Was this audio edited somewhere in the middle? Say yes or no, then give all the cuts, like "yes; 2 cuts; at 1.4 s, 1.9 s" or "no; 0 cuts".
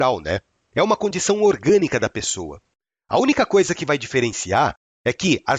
no; 0 cuts